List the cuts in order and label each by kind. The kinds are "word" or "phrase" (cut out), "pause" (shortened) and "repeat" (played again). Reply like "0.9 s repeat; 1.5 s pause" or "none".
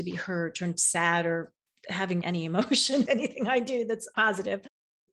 2.2 s word; 3.1 s word; 4.1 s word